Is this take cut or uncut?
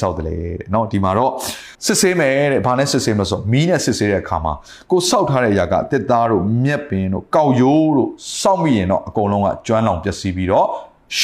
cut